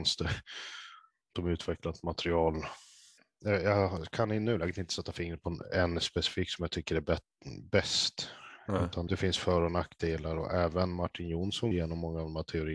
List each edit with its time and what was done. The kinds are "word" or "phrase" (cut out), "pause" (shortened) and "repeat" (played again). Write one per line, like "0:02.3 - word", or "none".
0:01.3 - word
0:09.1 - word
0:11.7 - word